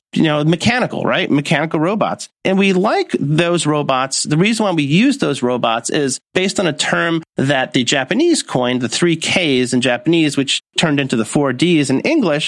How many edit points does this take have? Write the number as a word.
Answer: zero